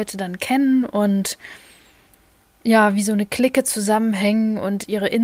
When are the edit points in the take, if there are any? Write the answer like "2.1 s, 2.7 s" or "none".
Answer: none

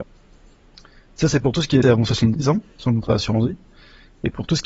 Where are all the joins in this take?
1.8 s, 2.7 s

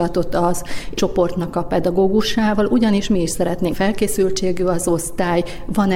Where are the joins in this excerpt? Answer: 1.0 s, 3.7 s

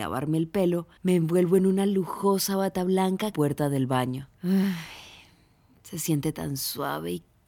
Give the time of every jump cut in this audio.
1.0 s, 3.3 s, 4.3 s

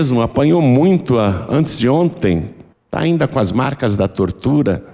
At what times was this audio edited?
2.7 s

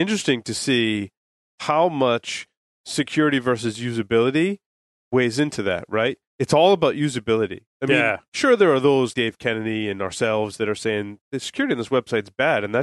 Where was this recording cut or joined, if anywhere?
9.1 s

